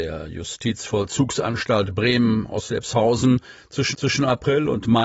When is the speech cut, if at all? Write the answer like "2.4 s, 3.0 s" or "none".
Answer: 3.9 s

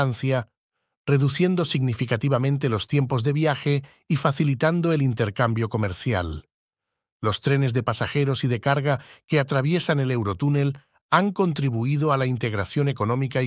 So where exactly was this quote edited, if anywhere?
none

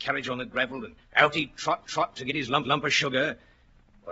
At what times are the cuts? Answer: 1.0 s, 1.8 s, 2.6 s

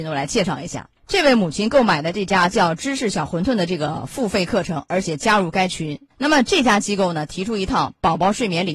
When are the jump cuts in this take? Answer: 1.0 s, 6.1 s

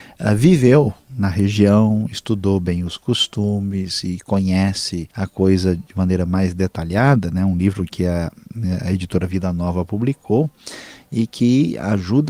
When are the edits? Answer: 5.1 s

